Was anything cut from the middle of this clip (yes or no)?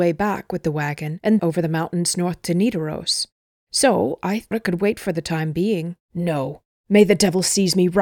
yes